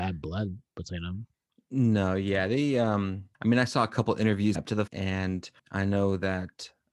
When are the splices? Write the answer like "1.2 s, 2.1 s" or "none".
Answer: 3.3 s, 4.6 s, 4.9 s, 5.6 s